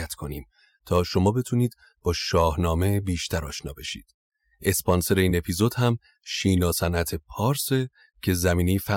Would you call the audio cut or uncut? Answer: uncut